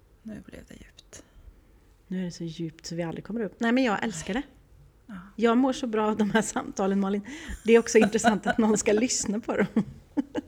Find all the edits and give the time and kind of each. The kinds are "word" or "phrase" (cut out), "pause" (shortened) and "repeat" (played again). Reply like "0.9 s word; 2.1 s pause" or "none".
none